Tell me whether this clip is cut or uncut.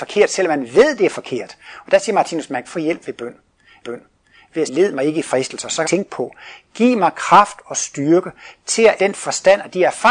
cut